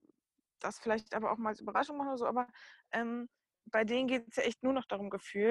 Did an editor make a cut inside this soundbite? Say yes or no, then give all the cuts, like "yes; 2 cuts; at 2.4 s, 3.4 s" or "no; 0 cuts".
no; 0 cuts